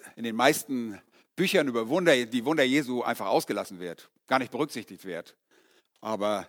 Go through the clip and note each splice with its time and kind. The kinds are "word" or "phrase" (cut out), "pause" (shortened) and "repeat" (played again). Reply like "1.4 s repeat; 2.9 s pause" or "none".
none